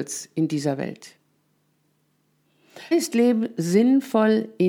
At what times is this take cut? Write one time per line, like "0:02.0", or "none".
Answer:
0:02.9